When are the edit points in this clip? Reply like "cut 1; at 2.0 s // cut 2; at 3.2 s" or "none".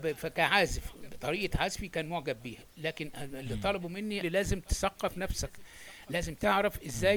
cut 1; at 2.7 s // cut 2; at 4.2 s